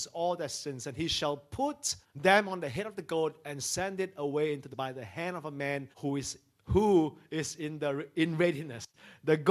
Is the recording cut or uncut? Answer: cut